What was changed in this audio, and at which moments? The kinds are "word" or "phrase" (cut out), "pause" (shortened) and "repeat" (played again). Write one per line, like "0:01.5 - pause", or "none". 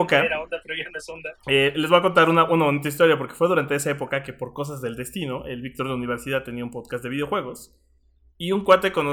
none

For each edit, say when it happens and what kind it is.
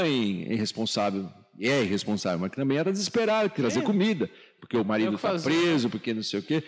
none

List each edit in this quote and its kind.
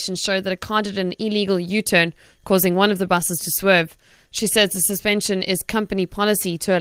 none

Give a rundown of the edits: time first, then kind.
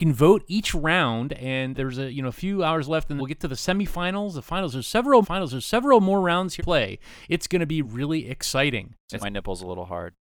0:01.7 - word
0:03.2 - word
0:05.2 - repeat
0:06.6 - word
0:07.8 - word
0:09.2 - phrase

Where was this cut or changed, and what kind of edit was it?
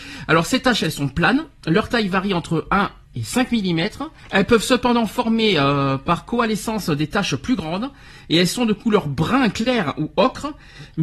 0:04.2 - pause

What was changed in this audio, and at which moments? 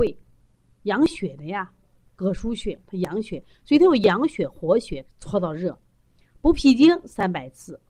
0:05.1 - phrase

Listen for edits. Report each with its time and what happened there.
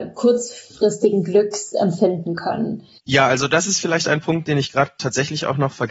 none

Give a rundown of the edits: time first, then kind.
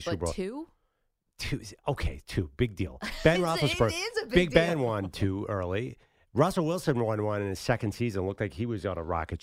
none

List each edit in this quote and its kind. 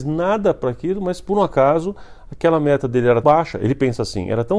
0:03.2 - word

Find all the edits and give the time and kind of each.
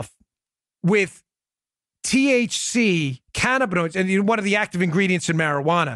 0:03.3 - pause

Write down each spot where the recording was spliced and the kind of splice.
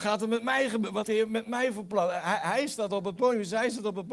0:01.0 - word

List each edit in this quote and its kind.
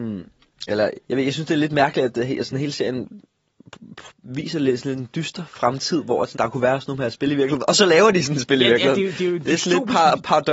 0:01.0 - pause
0:04.1 - pause
0:06.3 - word

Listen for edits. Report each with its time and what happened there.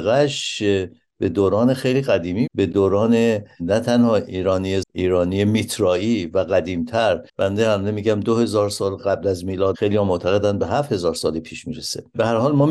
0:02.5 - word
0:04.8 - phrase
0:07.3 - pause

